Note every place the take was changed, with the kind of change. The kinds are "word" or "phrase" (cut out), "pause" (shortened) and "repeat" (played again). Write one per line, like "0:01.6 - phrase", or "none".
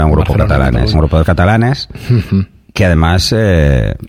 0:00.9 - word
0:01.2 - word